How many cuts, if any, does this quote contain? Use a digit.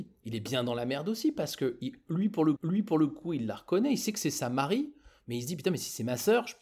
1